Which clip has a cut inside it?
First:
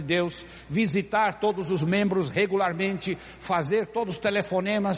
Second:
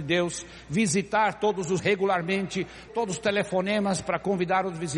second; 2 cuts; at 1.8 s, 2.9 s

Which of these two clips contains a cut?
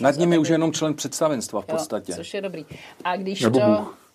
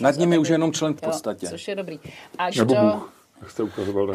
second; 2 cuts; at 1.0 s, 2.5 s

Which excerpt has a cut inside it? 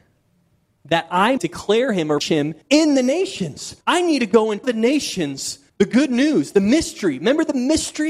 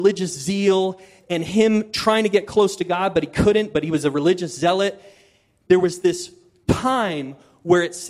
first; 6 cuts; at 1.4 s, 2.2 s, 2.6 s, 3.8 s, 4.6 s, 5.7 s

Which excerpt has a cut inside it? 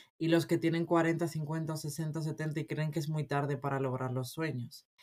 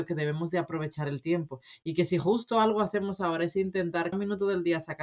second; 1 cut; at 4.1 s

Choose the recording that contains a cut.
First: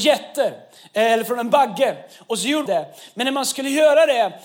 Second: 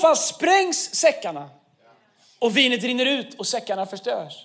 first; 1 cut; at 2.7 s

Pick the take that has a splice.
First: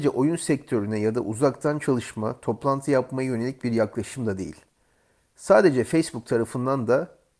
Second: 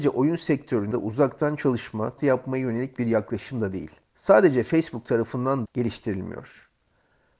second; 4 cuts; at 0.9 s, 2.2 s, 4.0 s, 5.7 s

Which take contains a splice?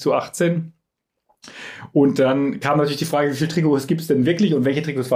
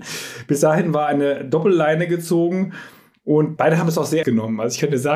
second; 2 cuts; at 3.6 s, 4.2 s

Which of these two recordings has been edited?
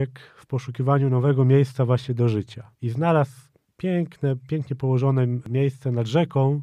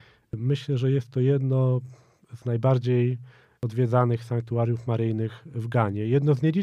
first; 2 cuts; at 2.7 s, 3.6 s

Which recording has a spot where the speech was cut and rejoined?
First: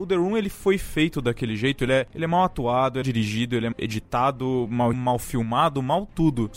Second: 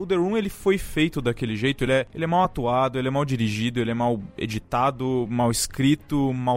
first; 3 cuts; at 3.0 s, 3.7 s, 4.9 s

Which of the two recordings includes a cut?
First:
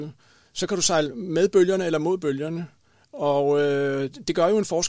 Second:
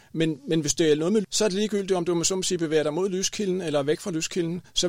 second; 1 cut; at 1.2 s

